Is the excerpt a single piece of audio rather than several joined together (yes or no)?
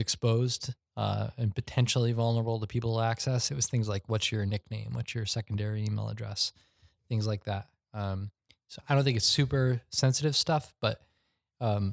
yes